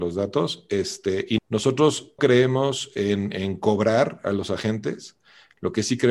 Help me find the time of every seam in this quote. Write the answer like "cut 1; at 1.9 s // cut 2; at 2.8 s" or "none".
cut 1; at 1.4 s // cut 2; at 2.2 s